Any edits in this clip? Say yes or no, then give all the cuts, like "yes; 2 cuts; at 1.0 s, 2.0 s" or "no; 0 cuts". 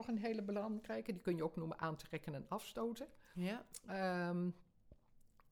no; 0 cuts